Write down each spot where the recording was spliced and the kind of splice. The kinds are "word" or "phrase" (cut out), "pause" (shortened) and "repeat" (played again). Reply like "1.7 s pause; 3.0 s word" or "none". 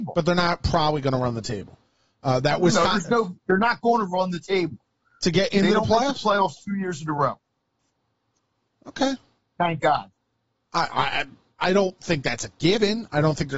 none